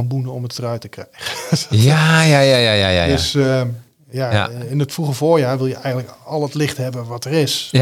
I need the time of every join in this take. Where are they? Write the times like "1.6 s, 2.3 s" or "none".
none